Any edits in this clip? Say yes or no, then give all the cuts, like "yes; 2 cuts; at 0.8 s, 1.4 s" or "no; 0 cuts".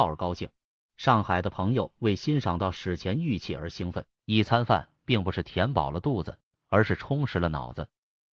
yes; 1 cut; at 4.1 s